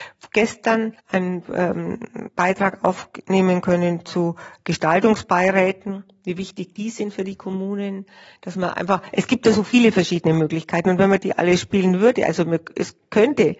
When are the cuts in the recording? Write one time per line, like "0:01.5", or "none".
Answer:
0:01.0